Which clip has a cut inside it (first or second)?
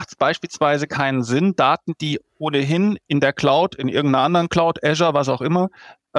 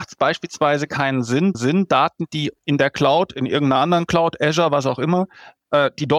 second